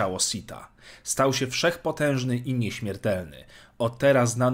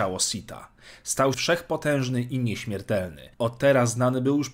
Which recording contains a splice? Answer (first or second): second